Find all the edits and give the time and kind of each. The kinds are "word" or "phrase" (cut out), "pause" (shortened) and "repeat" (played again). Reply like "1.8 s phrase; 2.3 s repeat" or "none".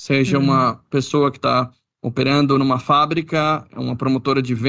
none